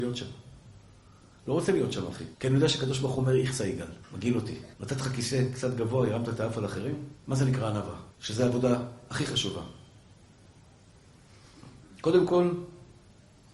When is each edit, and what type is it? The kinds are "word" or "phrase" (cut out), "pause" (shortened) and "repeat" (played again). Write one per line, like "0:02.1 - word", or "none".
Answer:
0:02.3 - pause
0:04.0 - pause
0:04.7 - pause
0:07.2 - pause
0:08.1 - pause